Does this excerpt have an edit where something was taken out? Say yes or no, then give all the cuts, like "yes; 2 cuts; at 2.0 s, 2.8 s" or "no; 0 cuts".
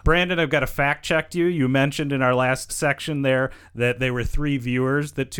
yes; 1 cut; at 2.7 s